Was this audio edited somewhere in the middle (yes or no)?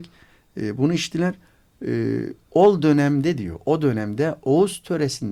no